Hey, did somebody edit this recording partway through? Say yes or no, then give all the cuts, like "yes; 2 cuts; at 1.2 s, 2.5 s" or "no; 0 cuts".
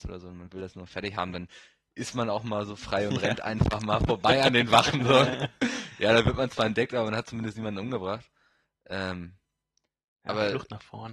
no; 0 cuts